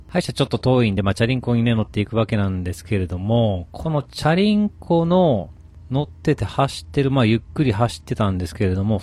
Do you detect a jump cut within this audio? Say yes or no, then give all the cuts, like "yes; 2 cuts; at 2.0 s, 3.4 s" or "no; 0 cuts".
no; 0 cuts